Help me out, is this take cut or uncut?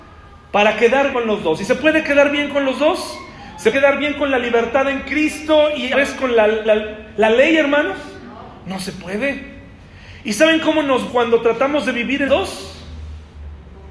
cut